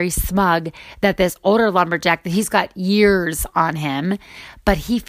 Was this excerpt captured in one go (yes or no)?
yes